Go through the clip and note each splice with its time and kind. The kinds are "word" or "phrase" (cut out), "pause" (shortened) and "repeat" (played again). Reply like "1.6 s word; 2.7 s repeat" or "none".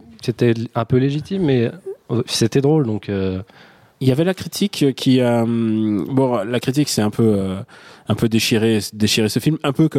none